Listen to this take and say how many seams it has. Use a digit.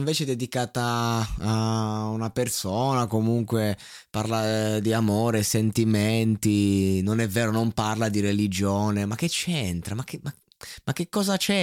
0